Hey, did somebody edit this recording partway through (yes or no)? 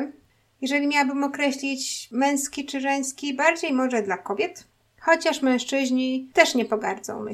no